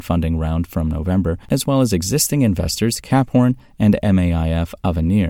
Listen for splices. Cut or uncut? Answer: cut